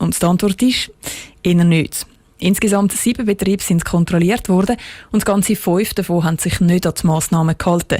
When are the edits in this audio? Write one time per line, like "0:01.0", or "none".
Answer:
none